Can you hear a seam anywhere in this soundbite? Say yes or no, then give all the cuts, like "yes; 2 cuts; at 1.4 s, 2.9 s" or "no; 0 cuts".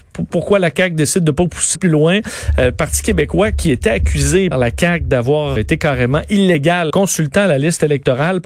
yes; 4 cuts; at 1.7 s, 4.5 s, 5.6 s, 6.9 s